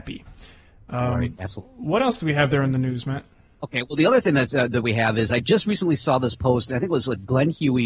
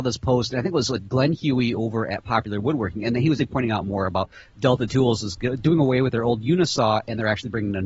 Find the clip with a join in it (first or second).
second